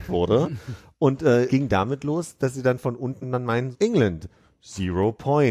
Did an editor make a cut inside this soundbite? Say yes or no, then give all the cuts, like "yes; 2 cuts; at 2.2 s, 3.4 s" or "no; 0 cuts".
yes; 3 cuts; at 1.5 s, 3.2 s, 3.7 s